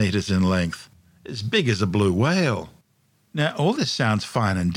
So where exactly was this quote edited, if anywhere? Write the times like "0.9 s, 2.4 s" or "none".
none